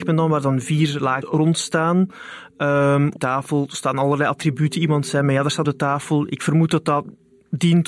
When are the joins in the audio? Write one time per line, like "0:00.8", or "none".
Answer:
0:01.2
0:03.2
0:05.6